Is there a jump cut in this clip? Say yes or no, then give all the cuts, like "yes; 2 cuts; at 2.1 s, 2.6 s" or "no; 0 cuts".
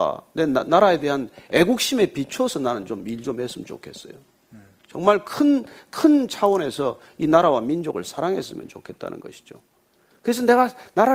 no; 0 cuts